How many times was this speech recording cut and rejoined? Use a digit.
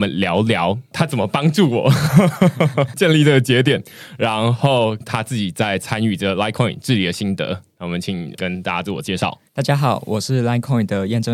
2